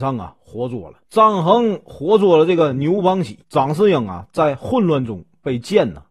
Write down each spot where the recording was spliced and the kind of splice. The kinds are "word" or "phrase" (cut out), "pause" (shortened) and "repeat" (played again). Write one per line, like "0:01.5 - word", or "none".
0:01.1 - pause
0:03.4 - pause